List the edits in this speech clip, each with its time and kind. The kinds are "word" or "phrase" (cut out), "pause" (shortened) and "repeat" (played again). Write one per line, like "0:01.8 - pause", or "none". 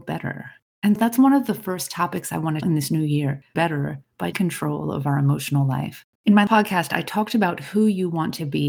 0:01.0 - word
0:02.6 - word
0:03.5 - word
0:04.3 - word
0:06.1 - pause
0:06.5 - word